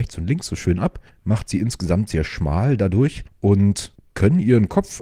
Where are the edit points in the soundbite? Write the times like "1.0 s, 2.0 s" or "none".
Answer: 1.1 s, 3.3 s